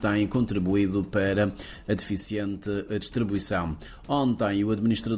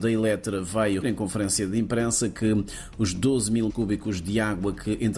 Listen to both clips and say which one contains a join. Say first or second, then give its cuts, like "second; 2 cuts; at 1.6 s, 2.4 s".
second; 2 cuts; at 1.0 s, 3.7 s